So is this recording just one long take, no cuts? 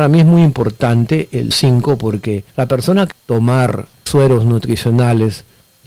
no; 4 cuts; at 1.5 s, 2.5 s, 3.1 s, 4.1 s

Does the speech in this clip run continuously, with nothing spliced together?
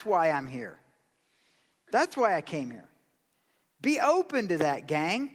yes; 0 cuts

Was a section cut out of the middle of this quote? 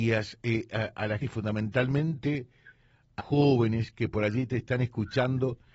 yes; 2 cuts; at 1.2 s, 3.2 s

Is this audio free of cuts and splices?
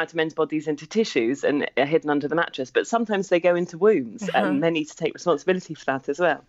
yes; 0 cuts

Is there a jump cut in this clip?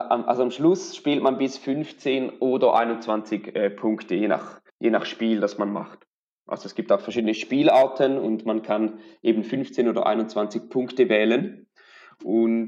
yes; 1 cut; at 4.7 s

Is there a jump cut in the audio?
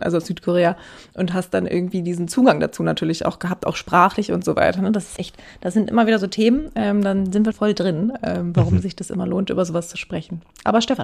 yes; 2 cuts; at 5.2 s, 7.5 s

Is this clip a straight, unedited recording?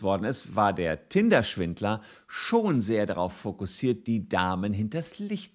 yes; 0 cuts

